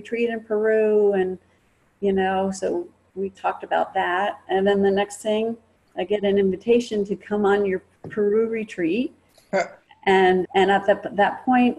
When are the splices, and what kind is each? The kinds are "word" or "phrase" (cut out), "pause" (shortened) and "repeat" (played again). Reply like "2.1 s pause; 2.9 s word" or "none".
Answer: 3.3 s word; 10.4 s word